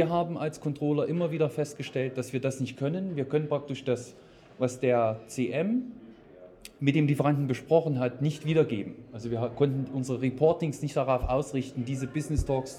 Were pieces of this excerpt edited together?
no; 0 cuts

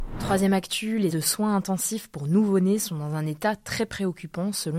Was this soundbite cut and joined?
yes; 1 cut; at 1.1 s

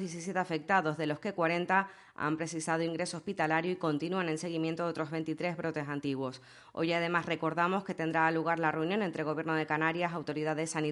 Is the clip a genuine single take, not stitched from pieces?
yes; 0 cuts

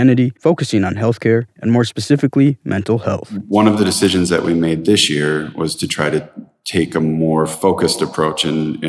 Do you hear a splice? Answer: no; 0 cuts

